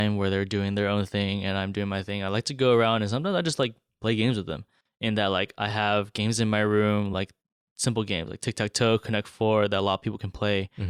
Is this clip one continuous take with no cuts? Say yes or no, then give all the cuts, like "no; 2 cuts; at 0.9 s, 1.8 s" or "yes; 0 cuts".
yes; 0 cuts